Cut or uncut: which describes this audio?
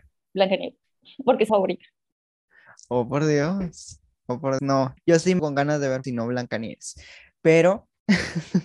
cut